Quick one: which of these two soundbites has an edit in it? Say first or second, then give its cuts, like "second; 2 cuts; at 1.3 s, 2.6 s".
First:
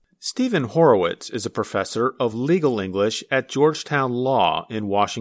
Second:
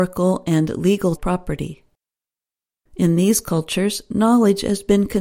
second; 1 cut; at 1.2 s